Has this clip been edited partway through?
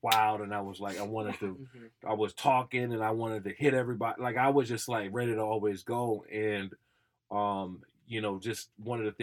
no; 0 cuts

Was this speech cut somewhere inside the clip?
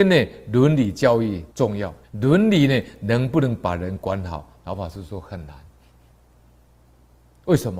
yes; 2 cuts; at 1.5 s, 2.0 s

